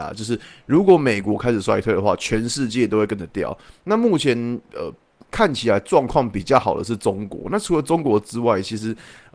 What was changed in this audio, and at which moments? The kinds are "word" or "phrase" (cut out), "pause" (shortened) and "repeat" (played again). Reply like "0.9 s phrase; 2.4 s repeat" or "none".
none